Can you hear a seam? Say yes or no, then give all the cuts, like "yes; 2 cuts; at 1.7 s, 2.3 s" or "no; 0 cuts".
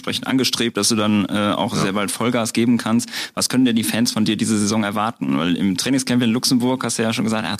no; 0 cuts